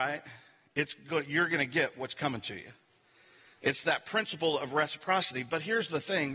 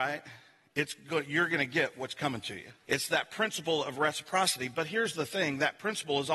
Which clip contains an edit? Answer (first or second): second